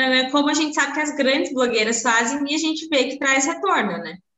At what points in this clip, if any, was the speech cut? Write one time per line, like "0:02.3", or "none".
none